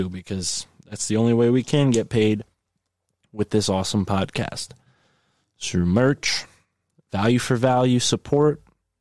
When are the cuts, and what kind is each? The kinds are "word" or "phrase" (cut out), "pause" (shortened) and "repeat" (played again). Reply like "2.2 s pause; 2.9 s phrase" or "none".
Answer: none